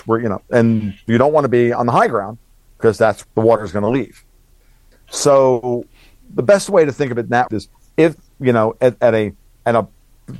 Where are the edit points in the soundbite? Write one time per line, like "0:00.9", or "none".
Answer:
0:03.2
0:07.5